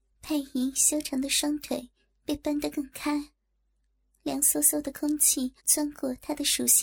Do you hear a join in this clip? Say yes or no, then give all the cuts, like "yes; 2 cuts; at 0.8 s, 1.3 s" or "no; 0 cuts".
yes; 1 cut; at 5.6 s